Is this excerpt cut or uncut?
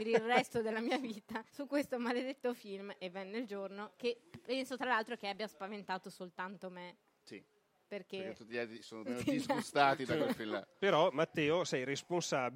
cut